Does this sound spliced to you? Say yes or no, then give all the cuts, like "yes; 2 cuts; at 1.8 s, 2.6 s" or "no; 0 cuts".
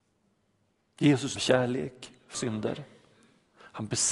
yes; 2 cuts; at 1.4 s, 2.3 s